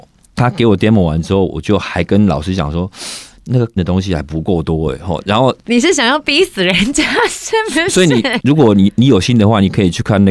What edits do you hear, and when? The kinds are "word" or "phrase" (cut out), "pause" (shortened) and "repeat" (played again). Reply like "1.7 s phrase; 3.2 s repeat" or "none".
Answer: 3.8 s word

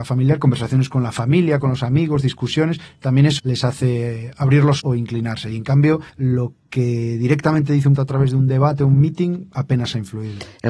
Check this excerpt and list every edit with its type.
3.4 s word; 4.8 s word; 6.1 s pause; 8.0 s word

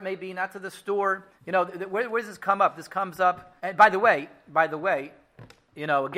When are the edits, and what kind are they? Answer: 1.3 s pause; 3.6 s pause

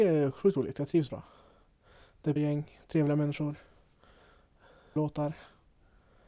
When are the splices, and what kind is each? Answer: 1.1 s word; 2.4 s word; 5.0 s word

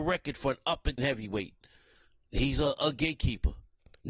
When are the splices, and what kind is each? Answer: 1.0 s word

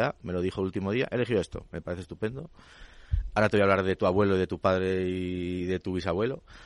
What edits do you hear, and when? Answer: none

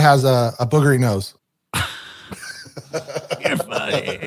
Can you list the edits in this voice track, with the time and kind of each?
1.4 s pause

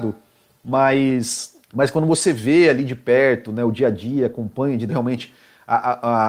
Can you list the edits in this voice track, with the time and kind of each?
1.6 s pause; 4.9 s phrase

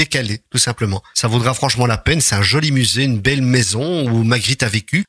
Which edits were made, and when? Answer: none

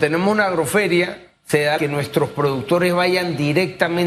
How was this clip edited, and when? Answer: 1.4 s pause; 1.8 s phrase

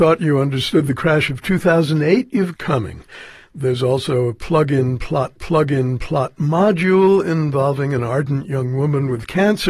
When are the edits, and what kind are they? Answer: 2.5 s phrase; 5.4 s repeat

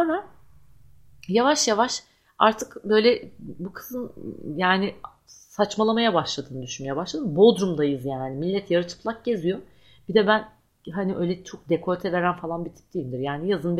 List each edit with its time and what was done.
none

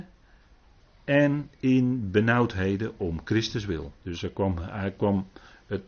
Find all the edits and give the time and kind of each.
4.0 s pause

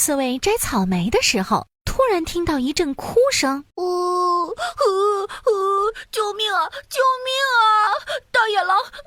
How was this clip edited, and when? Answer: 1.7 s pause; 3.7 s pause

